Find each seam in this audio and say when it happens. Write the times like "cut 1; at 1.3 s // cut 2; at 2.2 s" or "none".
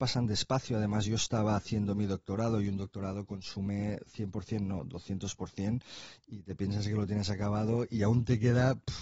none